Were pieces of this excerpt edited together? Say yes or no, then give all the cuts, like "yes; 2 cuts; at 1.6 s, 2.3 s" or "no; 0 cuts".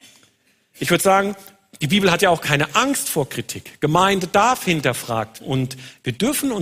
yes; 1 cut; at 5.4 s